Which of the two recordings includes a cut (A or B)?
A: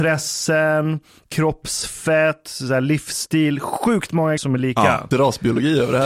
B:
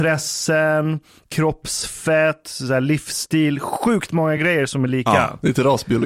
A